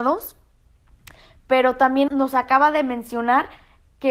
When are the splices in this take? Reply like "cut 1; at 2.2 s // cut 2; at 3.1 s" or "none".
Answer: cut 1; at 2.1 s